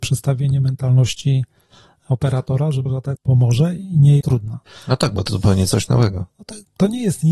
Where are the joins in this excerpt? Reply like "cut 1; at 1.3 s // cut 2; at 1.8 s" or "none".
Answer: cut 1; at 2.9 s // cut 2; at 3.2 s // cut 3; at 4.2 s // cut 4; at 5.3 s